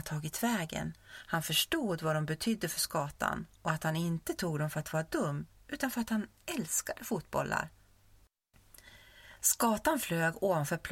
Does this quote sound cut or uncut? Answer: cut